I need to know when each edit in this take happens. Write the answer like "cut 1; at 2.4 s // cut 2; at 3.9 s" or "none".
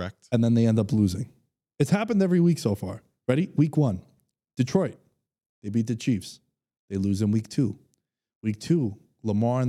none